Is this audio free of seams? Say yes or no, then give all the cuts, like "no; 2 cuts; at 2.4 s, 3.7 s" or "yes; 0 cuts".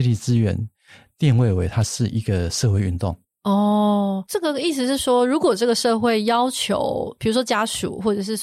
yes; 0 cuts